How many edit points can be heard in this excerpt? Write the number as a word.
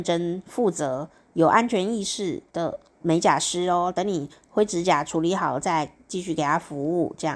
one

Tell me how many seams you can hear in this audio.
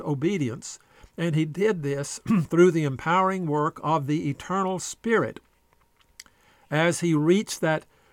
zero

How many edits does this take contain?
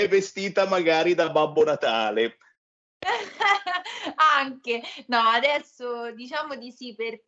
zero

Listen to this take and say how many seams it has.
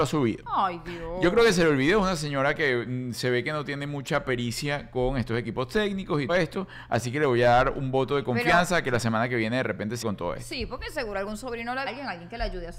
three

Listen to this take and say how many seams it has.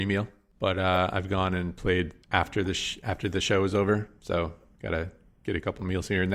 one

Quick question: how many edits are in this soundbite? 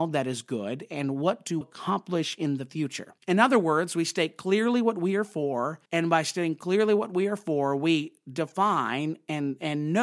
three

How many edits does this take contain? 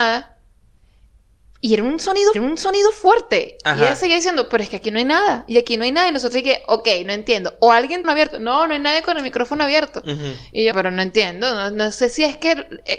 three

